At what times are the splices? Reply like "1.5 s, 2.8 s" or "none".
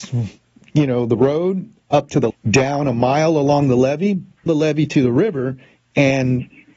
2.3 s, 4.5 s